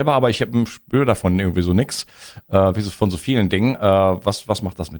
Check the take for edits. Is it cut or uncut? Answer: uncut